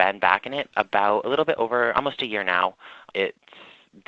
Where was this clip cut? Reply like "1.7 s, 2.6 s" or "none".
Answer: none